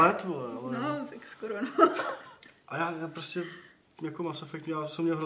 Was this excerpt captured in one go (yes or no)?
yes